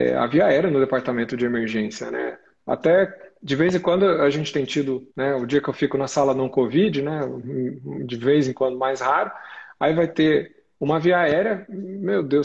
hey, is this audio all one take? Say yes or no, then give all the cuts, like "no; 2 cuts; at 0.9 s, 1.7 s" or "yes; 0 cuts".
no; 1 cut; at 5.1 s